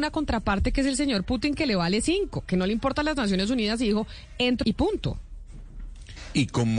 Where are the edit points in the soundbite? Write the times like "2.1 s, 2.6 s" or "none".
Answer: 4.6 s

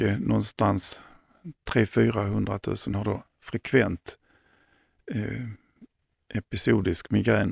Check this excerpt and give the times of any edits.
none

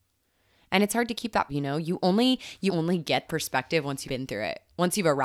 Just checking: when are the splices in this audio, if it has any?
1.5 s, 2.7 s, 3.3 s, 4.0 s

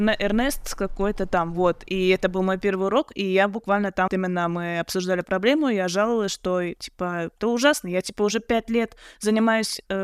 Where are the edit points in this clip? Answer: 4.1 s

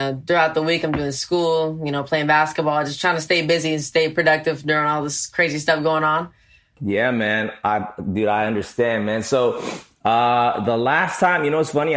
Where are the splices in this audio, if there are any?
none

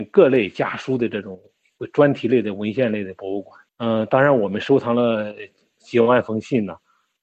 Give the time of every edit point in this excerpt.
3.7 s

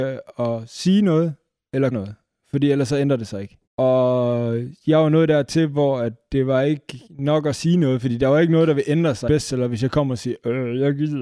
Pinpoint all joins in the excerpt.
1.9 s, 3.7 s, 7.1 s, 9.3 s

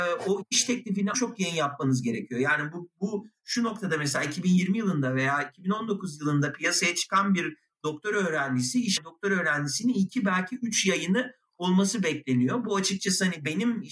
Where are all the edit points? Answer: 1.1 s, 9.0 s

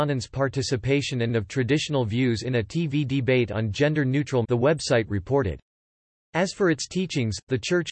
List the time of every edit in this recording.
1.3 s, 4.4 s

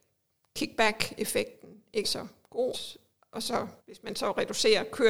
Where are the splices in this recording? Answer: 2.0 s, 2.7 s, 3.8 s

